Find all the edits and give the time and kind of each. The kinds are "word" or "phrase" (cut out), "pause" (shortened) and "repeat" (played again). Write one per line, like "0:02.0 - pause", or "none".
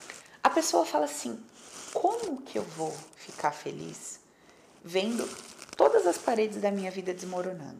none